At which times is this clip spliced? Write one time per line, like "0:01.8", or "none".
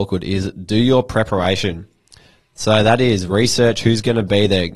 none